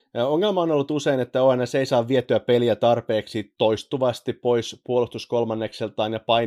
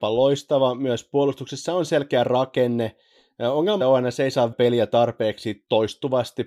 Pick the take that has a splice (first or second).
second